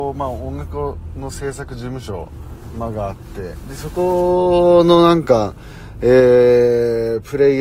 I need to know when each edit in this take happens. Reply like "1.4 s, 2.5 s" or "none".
none